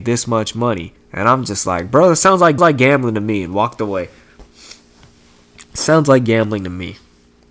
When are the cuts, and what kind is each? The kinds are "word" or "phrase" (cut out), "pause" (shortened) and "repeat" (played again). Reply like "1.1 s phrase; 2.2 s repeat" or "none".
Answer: 1.0 s pause; 2.6 s repeat